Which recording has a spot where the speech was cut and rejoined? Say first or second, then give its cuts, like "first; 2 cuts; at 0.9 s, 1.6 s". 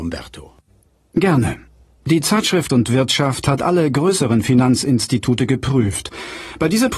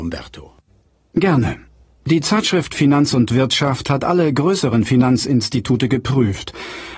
first; 1 cut; at 2.7 s